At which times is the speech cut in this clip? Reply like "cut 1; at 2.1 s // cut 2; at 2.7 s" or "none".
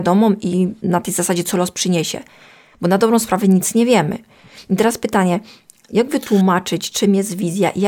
none

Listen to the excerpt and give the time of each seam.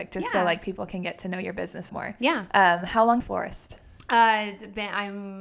cut 1; at 1.9 s // cut 2; at 3.2 s

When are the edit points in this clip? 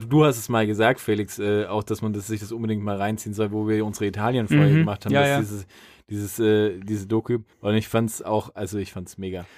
cut 1; at 7.5 s

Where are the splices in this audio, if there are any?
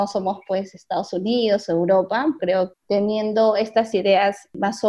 cut 1; at 2.4 s // cut 2; at 2.7 s

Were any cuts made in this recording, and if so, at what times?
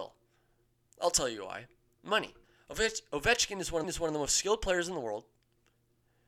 cut 1; at 2.4 s // cut 2; at 3.8 s

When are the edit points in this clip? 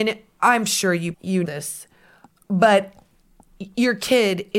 cut 1; at 1.1 s // cut 2; at 1.5 s

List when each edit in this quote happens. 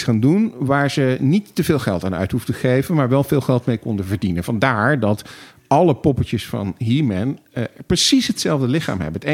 none

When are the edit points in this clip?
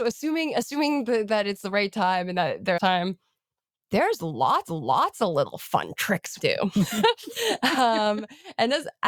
cut 1; at 2.8 s // cut 2; at 4.7 s // cut 3; at 6.4 s

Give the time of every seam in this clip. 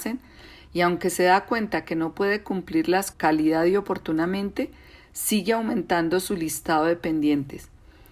cut 1; at 3.1 s

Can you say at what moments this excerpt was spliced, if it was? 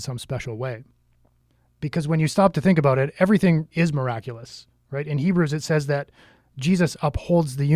cut 1; at 3.7 s

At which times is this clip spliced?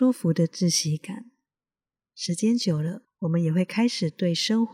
cut 1; at 3.0 s

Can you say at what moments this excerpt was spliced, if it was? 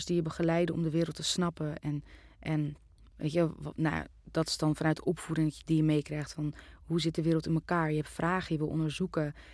cut 1; at 3.0 s

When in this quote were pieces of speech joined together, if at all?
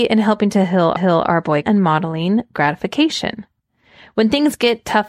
cut 1; at 1.0 s // cut 2; at 1.6 s // cut 3; at 2.5 s

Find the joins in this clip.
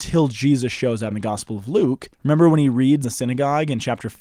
cut 1; at 1.1 s // cut 2; at 2.1 s // cut 3; at 3.0 s

